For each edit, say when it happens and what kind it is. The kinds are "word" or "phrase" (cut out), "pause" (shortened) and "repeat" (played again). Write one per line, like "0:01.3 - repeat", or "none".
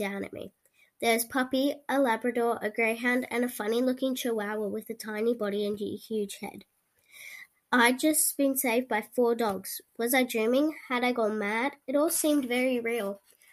none